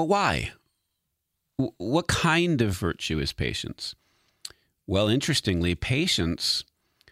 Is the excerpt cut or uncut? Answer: uncut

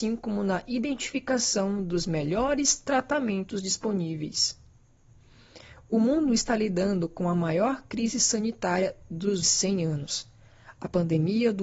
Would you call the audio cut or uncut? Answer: cut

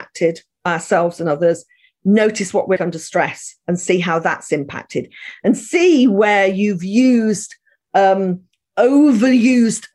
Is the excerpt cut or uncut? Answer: cut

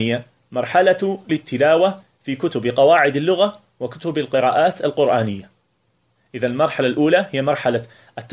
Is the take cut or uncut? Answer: cut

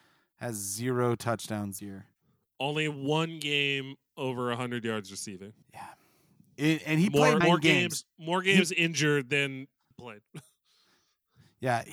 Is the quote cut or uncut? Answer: cut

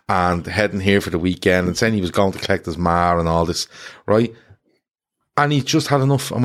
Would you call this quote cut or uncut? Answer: uncut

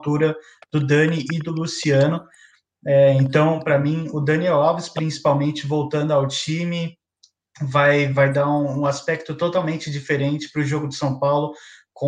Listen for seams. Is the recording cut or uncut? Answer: uncut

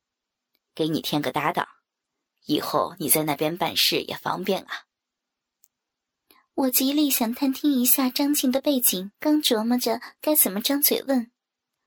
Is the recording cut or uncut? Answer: cut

